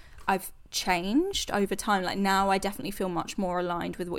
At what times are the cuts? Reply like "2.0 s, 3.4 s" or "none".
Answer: none